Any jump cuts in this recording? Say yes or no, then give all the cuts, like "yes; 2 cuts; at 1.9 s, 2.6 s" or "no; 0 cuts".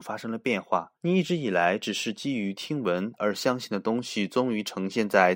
yes; 1 cut; at 1.0 s